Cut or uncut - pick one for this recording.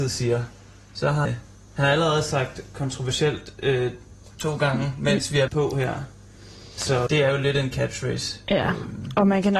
cut